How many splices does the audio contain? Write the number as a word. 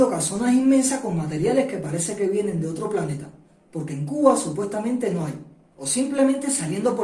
zero